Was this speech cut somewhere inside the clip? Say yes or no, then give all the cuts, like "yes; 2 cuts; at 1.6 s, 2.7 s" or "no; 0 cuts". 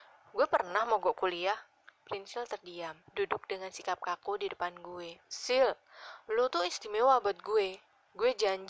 yes; 3 cuts; at 1.8 s, 3.0 s, 5.2 s